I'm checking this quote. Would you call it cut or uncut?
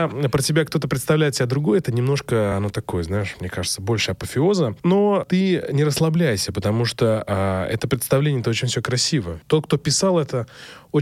uncut